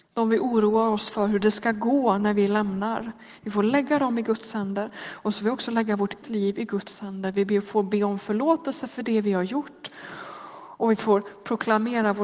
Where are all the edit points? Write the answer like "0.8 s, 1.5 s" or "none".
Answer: 6.2 s

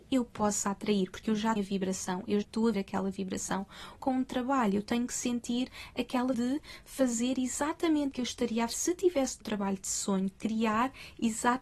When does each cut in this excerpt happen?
1.6 s, 2.4 s, 2.7 s, 4.0 s, 6.3 s, 8.1 s, 8.7 s, 9.4 s

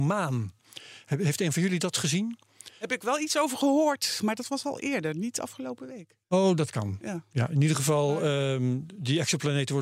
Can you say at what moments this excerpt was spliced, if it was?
2.8 s, 6.2 s

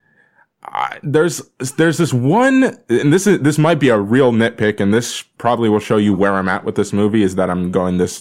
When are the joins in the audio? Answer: none

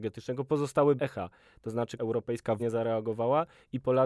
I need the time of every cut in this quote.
1.0 s, 2.0 s, 2.6 s

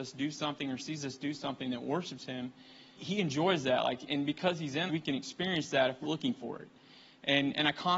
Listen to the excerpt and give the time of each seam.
3.0 s, 4.1 s, 4.9 s, 6.0 s

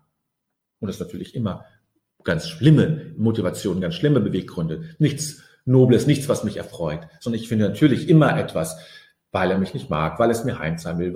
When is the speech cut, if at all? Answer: none

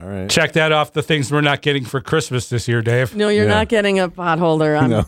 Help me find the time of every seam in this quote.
none

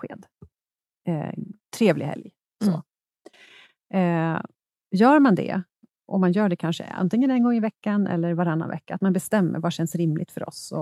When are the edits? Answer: none

